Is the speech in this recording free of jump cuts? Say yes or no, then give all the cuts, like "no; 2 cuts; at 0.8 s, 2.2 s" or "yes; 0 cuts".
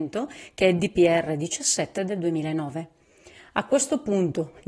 yes; 0 cuts